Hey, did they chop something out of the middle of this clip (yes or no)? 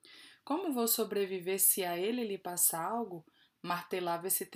no